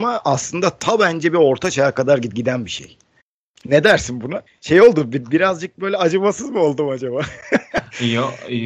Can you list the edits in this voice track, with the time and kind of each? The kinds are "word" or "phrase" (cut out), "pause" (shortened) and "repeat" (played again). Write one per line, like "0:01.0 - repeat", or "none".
0:03.2 - pause
0:04.5 - pause